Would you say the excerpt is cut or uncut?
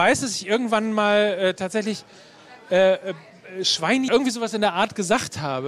cut